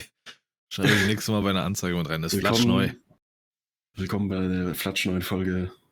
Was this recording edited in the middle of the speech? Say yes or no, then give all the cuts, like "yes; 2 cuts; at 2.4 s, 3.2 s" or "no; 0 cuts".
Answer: no; 0 cuts